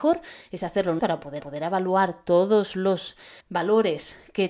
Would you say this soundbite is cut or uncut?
cut